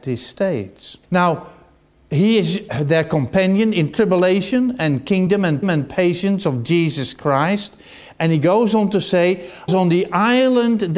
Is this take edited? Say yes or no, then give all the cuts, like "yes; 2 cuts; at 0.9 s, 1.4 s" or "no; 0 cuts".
yes; 3 cuts; at 1.0 s, 5.6 s, 9.7 s